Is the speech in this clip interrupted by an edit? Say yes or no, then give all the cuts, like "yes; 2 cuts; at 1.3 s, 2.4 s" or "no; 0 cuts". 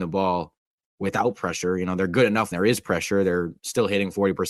yes; 1 cut; at 2.5 s